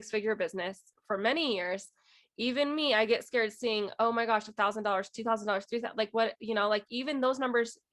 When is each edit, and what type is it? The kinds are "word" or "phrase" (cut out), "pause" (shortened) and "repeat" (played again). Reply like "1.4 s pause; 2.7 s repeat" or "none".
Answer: none